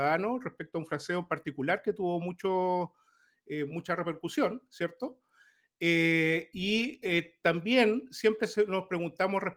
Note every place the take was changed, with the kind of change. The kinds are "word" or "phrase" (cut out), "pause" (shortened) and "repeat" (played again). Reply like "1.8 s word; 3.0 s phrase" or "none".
none